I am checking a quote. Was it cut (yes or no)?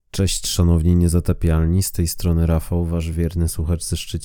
no